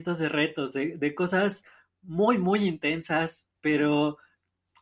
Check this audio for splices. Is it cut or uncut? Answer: uncut